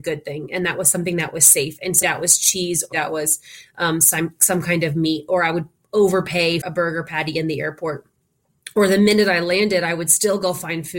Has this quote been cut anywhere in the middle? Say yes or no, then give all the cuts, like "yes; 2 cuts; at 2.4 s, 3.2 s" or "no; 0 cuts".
yes; 3 cuts; at 2.0 s, 2.9 s, 6.6 s